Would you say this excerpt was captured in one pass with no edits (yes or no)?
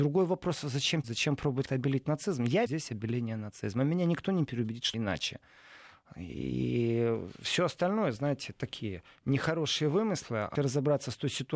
no